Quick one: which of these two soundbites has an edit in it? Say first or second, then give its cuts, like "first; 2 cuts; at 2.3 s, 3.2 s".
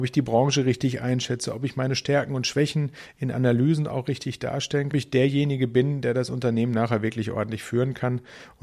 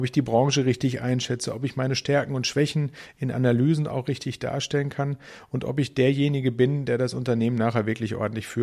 first; 1 cut; at 4.9 s